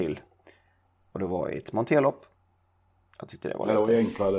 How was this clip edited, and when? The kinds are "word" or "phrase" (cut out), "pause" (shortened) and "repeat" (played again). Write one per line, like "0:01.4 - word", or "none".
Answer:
none

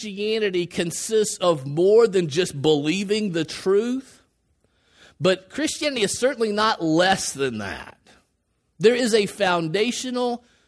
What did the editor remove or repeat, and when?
none

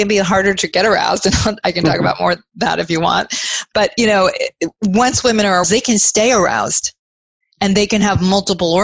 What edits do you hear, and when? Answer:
0:05.6 - word

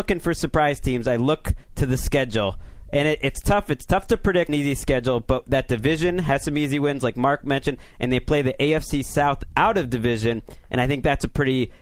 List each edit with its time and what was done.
0:01.6 - pause
0:04.5 - phrase

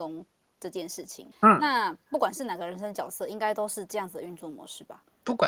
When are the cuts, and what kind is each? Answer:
0:01.3 - pause

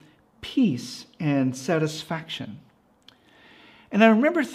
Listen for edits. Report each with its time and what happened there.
none

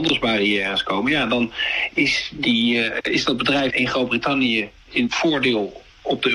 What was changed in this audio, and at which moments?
0:03.7 - word

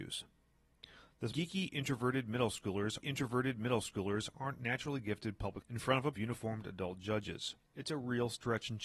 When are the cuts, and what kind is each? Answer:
0:01.3 - phrase
0:03.0 - repeat
0:05.6 - word
0:06.1 - phrase
0:07.6 - pause

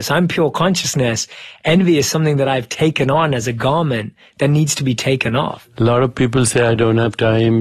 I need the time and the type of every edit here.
none

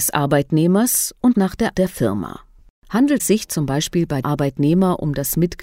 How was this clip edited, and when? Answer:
0:01.3 - word
0:01.7 - word
0:03.2 - word
0:04.2 - word

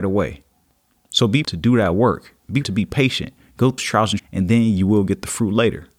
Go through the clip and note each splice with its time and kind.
0:01.4 - word
0:02.6 - word
0:03.8 - word
0:04.2 - word

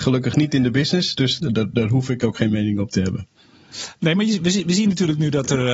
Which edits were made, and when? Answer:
0:01.4 - word

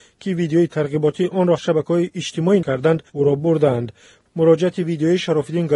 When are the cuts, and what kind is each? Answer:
0:01.6 - phrase
0:02.6 - word
0:03.1 - pause

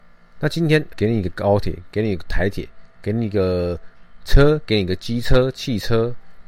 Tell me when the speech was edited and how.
0:00.9 - word

